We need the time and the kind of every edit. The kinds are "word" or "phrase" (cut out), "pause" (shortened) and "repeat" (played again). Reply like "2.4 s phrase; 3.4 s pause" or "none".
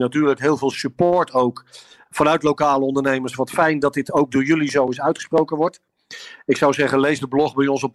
none